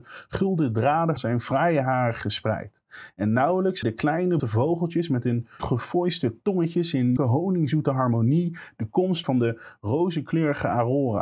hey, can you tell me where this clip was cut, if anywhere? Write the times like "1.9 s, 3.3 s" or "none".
1.2 s, 3.8 s, 4.4 s, 5.6 s, 7.2 s, 9.2 s